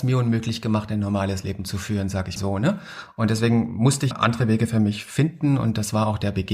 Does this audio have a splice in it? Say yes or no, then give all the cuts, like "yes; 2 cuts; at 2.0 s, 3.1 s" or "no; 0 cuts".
yes; 2 cuts; at 2.4 s, 4.1 s